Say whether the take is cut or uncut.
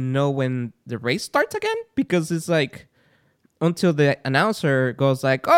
uncut